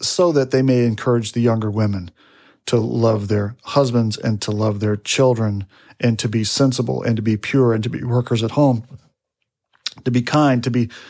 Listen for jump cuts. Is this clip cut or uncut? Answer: uncut